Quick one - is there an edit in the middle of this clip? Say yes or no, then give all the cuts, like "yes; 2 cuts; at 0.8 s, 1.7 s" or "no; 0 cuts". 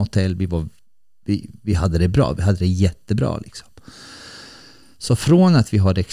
no; 0 cuts